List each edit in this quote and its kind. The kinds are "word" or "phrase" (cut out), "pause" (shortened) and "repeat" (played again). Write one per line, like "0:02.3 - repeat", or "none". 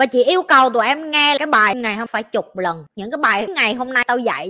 0:01.4 - word
0:01.7 - word
0:02.1 - word
0:03.5 - word

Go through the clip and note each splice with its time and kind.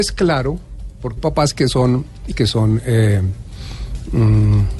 0:01.2 - word
0:02.3 - word

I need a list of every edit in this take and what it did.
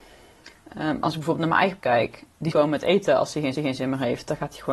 0:01.8 - word
0:02.5 - word
0:03.6 - repeat

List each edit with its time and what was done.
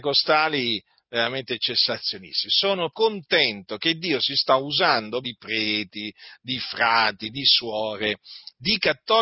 0:02.9 - word
0:05.2 - word

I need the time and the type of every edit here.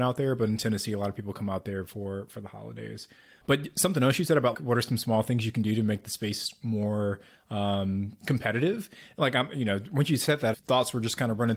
0:03.4 - word
0:04.5 - word
0:10.5 - word

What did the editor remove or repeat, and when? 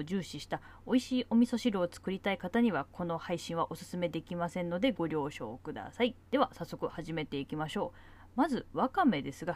0:06.3 - pause

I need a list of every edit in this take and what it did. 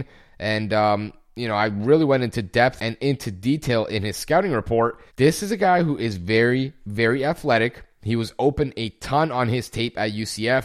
0:05.1 - pause

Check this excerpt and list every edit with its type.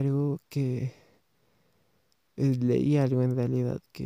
none

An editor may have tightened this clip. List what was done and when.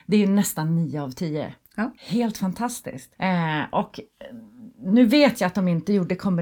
0:02.0 - pause
0:03.1 - pause

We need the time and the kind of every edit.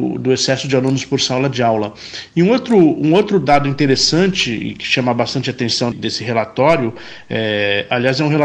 0:05.9 - word

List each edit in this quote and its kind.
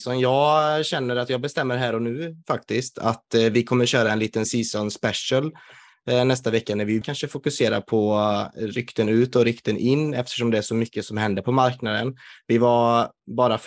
0:04.5 - word
0:07.0 - word

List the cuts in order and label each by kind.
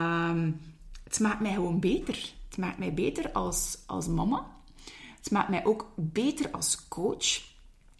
none

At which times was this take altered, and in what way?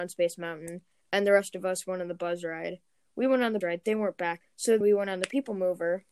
0:03.6 - word
0:04.4 - word
0:04.8 - word

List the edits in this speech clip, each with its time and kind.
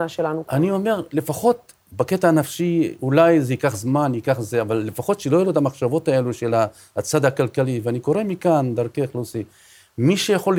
none

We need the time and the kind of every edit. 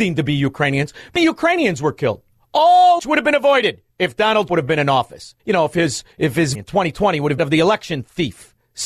0:01.2 - phrase
0:03.0 - phrase
0:03.9 - pause
0:04.5 - word
0:05.4 - pause
0:06.1 - pause
0:06.5 - word
0:07.4 - phrase

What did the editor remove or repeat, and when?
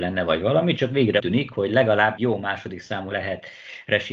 0:01.2 - word
0:02.2 - word
0:03.1 - word

